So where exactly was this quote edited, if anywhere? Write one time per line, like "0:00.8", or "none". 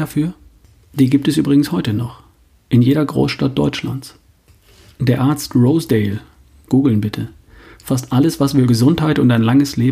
0:08.7